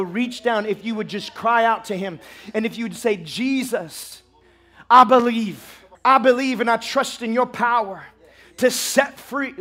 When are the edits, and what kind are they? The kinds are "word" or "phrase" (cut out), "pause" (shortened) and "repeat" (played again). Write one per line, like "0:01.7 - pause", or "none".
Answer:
0:05.9 - pause